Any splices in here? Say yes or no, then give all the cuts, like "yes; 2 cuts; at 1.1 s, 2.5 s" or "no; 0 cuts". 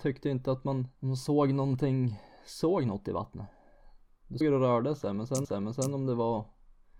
yes; 3 cuts; at 1.0 s, 4.4 s, 5.4 s